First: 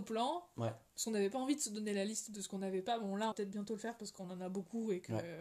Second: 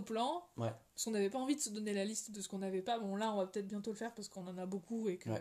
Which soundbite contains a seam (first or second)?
first